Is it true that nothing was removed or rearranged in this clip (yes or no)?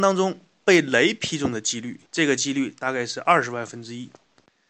no